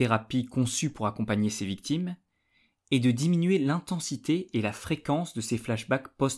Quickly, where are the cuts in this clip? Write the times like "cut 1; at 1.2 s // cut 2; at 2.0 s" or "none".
none